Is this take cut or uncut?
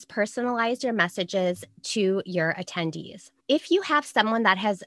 cut